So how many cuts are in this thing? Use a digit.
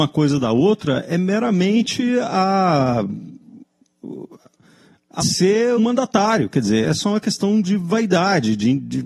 3